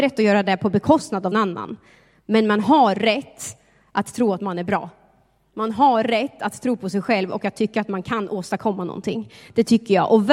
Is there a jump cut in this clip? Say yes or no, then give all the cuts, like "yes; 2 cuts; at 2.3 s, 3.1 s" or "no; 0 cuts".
yes; 1 cut; at 1.3 s